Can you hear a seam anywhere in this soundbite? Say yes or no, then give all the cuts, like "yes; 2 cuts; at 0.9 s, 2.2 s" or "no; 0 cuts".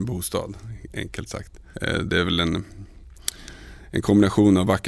no; 0 cuts